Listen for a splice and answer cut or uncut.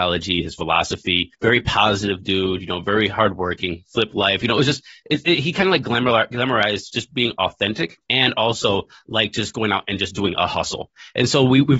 uncut